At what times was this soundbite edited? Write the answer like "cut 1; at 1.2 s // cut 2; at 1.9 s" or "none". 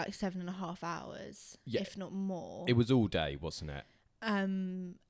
none

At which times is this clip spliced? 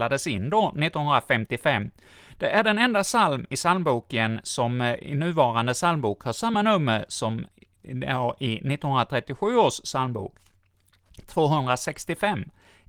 none

